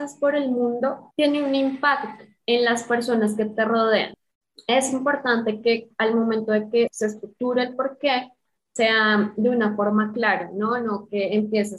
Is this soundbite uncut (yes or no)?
yes